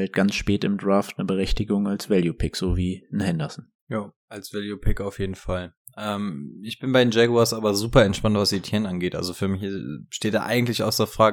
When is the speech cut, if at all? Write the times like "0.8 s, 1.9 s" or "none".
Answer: 3.8 s

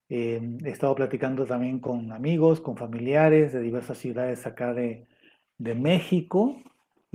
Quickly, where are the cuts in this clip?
none

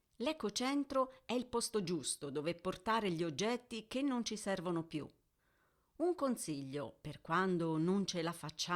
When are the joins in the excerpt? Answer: none

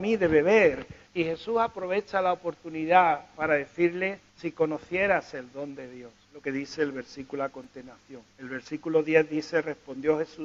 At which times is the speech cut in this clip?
1.1 s, 4.3 s, 6.2 s, 8.3 s

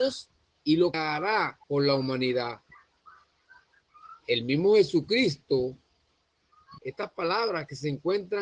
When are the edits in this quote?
0.9 s, 1.6 s, 6.8 s

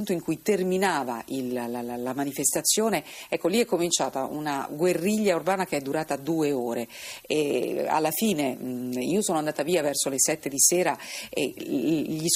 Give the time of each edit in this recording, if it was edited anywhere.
none

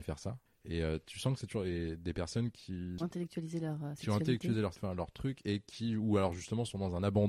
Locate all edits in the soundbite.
3.0 s, 4.7 s

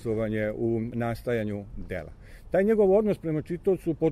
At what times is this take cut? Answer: none

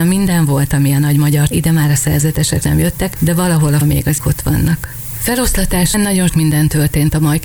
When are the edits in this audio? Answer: 1.5 s, 2.6 s, 3.2 s, 3.8 s, 4.2 s, 5.9 s, 6.3 s

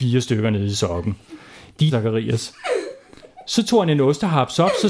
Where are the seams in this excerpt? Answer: 1.9 s

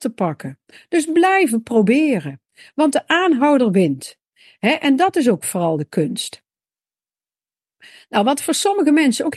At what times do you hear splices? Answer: none

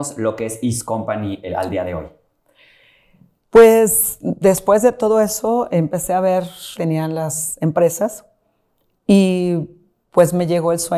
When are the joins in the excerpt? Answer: 1.4 s, 6.8 s

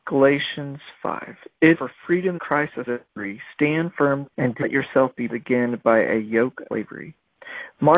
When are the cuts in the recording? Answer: 1.7 s, 2.4 s, 2.9 s, 4.3 s, 4.6 s, 5.3 s, 6.7 s

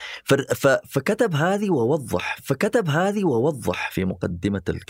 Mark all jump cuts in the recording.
2.4 s

